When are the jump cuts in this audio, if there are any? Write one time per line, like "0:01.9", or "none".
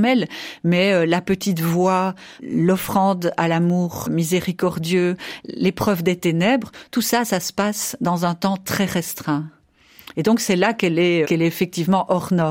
0:04.1
0:11.2